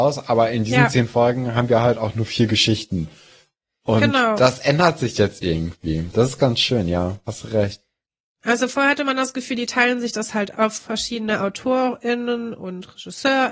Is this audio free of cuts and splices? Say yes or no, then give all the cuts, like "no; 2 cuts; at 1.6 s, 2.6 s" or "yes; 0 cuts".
no; 1 cut; at 10.5 s